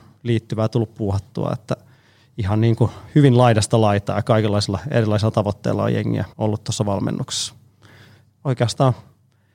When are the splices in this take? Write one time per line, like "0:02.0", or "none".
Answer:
0:06.3